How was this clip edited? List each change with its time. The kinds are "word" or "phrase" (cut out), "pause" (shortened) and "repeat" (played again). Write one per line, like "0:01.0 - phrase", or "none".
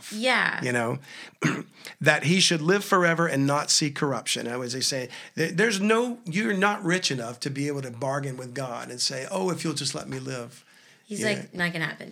none